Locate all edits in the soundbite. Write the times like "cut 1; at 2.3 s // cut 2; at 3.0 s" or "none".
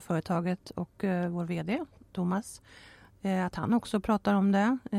none